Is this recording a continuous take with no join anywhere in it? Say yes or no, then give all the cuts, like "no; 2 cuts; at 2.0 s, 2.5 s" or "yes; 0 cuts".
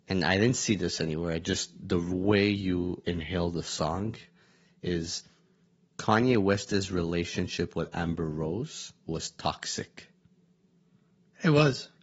yes; 0 cuts